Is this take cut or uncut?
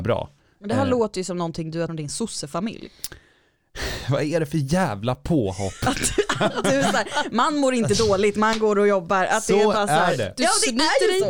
cut